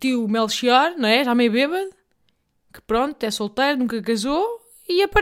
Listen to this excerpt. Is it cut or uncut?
uncut